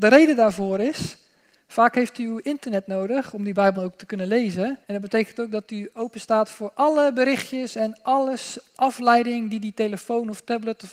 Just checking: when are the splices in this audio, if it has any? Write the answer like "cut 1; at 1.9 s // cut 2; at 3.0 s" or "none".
cut 1; at 3.8 s // cut 2; at 4.8 s